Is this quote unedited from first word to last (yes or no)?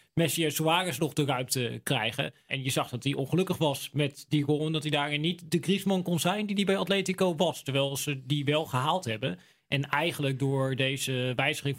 yes